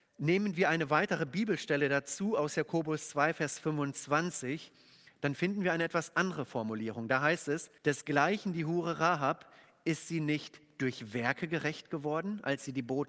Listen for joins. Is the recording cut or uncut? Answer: cut